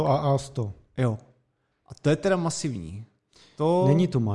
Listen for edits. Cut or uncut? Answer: uncut